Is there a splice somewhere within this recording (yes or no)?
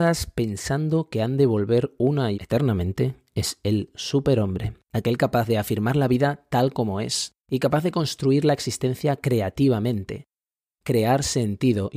yes